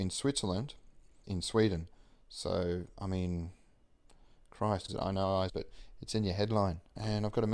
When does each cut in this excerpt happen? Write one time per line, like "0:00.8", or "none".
0:01.2
0:04.9
0:05.5